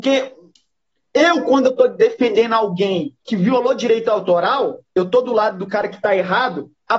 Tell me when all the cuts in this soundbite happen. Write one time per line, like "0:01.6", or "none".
0:03.2